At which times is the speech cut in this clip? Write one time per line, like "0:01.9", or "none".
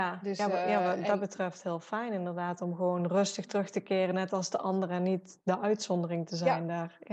none